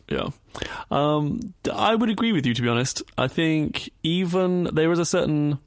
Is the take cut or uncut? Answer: cut